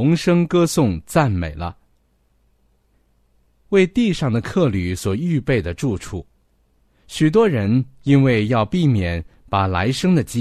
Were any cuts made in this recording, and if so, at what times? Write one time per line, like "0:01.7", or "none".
none